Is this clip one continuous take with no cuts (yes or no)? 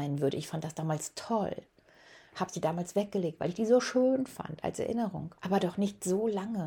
no